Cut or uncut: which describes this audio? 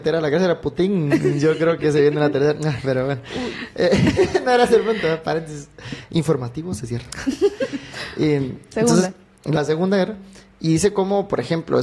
uncut